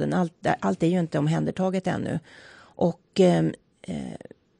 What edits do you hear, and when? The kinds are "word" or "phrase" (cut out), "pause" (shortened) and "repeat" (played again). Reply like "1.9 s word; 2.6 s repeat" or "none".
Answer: none

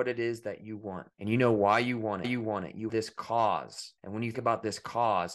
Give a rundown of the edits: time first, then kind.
1.1 s pause; 2.2 s repeat; 2.9 s word; 4.0 s pause; 4.3 s word

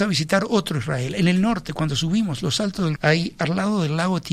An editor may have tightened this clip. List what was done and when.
3.0 s word

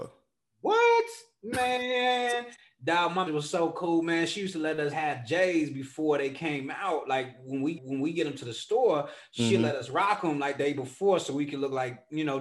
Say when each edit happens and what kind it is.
3.3 s word; 4.9 s word; 7.7 s repeat; 10.6 s word

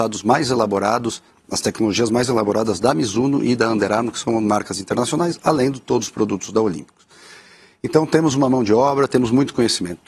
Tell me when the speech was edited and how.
none

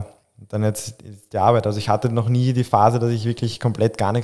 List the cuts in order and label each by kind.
none

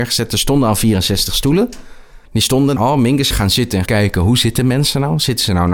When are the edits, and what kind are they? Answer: 2.3 s pause; 2.8 s word; 3.3 s phrase; 3.9 s word

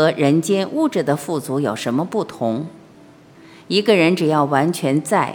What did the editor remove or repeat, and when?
none

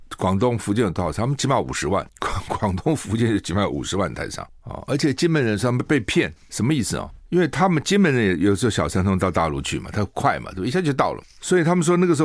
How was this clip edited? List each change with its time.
2.1 s pause

